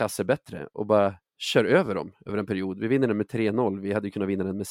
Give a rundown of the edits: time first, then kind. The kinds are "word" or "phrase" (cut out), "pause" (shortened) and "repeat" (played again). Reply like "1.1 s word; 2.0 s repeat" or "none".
none

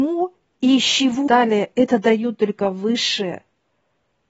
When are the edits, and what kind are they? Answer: 1.3 s phrase

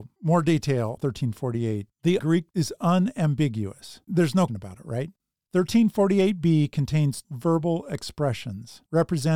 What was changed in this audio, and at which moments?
1.0 s word; 2.2 s word; 2.5 s word; 4.1 s word; 4.5 s word; 7.2 s word

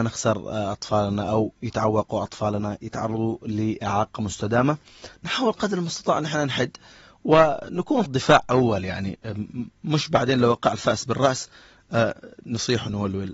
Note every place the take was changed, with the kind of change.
8.1 s word

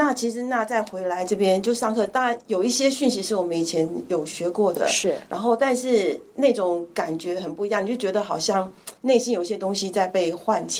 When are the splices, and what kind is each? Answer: 9.0 s pause

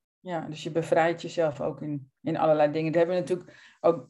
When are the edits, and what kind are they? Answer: 2.2 s pause

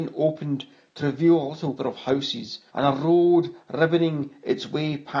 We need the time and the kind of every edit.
1.8 s word; 2.7 s pause

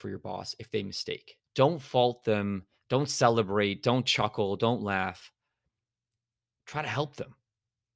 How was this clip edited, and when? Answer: 1.4 s pause

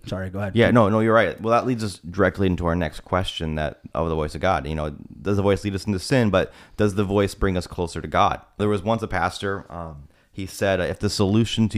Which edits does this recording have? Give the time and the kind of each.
3.9 s pause; 8.6 s word

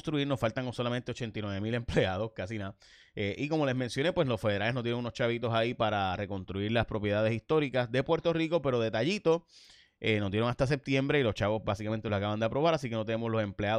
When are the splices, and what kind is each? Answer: none

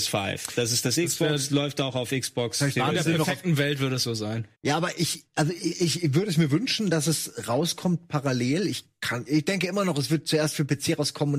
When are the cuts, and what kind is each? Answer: 4.5 s pause; 9.3 s word

